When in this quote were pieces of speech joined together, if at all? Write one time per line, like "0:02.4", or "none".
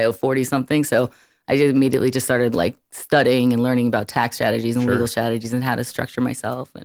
none